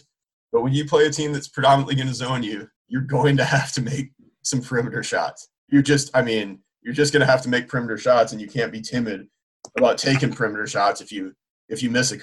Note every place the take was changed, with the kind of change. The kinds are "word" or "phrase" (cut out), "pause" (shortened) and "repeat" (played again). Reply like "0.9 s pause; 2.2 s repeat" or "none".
2.8 s pause; 5.6 s pause